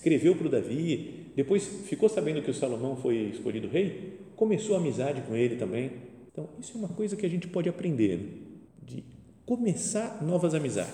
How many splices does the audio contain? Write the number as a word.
two